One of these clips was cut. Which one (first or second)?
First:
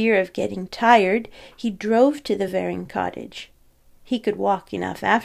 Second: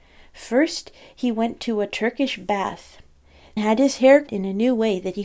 second